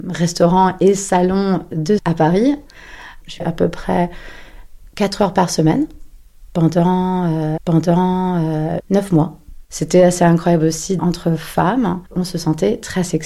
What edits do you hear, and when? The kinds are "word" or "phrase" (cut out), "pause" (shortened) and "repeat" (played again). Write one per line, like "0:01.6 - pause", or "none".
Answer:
0:02.0 - word
0:03.4 - word
0:07.6 - repeat
0:09.6 - pause
0:11.0 - word
0:12.1 - pause